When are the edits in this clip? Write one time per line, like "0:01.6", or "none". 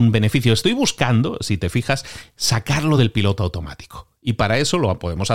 none